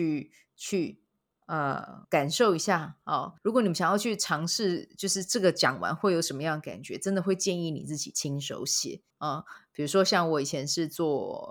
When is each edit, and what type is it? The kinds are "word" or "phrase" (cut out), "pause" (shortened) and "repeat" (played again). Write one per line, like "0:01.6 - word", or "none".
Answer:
0:02.0 - pause
0:03.4 - pause
0:09.1 - pause